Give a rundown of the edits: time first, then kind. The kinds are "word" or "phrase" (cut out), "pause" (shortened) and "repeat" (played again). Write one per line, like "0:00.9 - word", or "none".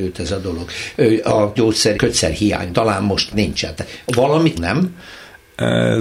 0:01.5 - word
0:01.9 - word
0:02.7 - word
0:03.3 - word
0:04.5 - word